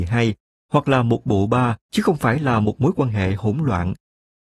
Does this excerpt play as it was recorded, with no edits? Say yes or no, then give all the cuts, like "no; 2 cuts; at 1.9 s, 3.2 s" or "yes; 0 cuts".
no; 1 cut; at 1.8 s